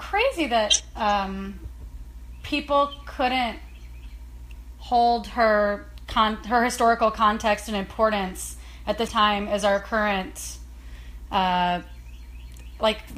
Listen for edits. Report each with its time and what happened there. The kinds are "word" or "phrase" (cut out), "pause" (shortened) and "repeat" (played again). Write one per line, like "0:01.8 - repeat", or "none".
0:09.1 - word